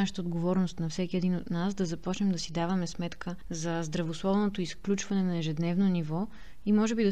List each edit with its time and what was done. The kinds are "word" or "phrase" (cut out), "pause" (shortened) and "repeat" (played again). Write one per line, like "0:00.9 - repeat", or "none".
none